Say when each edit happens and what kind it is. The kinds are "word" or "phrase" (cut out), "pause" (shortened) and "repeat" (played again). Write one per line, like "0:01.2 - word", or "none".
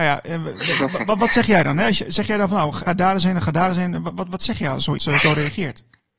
0:02.9 - word
0:05.0 - word